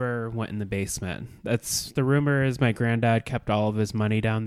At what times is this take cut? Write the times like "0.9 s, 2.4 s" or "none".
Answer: none